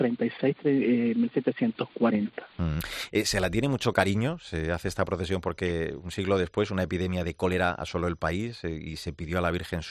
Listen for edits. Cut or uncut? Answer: uncut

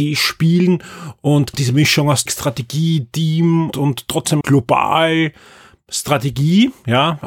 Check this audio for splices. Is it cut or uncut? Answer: cut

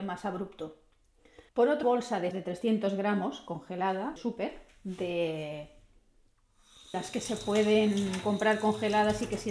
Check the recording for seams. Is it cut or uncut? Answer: cut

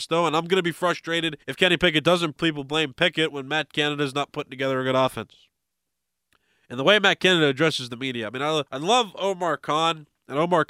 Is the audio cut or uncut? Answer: cut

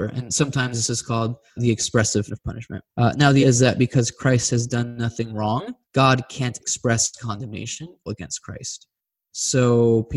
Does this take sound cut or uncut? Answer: cut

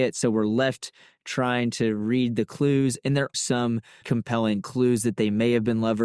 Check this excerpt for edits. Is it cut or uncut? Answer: cut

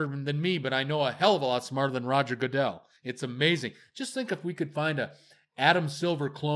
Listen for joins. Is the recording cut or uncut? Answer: cut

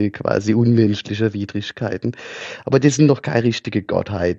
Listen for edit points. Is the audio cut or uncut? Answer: uncut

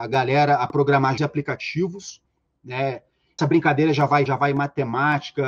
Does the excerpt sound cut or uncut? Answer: cut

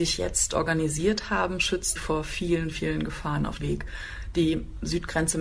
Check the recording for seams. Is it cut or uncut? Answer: cut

